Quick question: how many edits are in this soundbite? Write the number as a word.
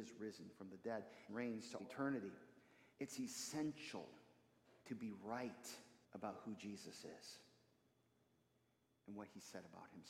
five